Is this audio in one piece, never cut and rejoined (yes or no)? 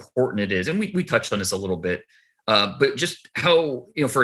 yes